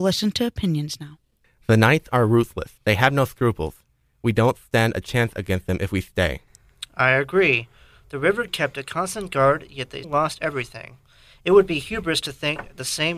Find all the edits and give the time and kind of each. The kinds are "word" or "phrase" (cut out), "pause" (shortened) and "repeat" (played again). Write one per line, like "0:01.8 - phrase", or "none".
0:02.8 - pause
0:08.5 - word
0:10.0 - word